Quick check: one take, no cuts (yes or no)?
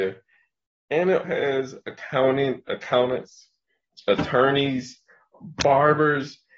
no